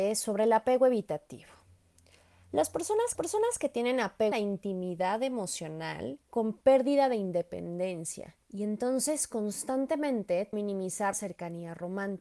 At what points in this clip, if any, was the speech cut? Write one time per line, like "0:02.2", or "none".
0:03.1
0:04.3
0:06.2
0:08.4
0:10.5
0:11.1